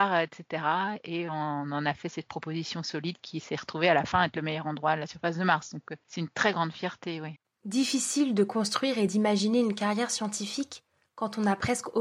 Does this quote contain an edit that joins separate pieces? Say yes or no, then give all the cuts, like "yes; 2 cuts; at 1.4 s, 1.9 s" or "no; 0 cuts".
no; 0 cuts